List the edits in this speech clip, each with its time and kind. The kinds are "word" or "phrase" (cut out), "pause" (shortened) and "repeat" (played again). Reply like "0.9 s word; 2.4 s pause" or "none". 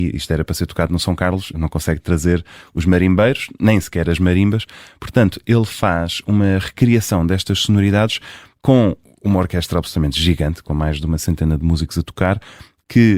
none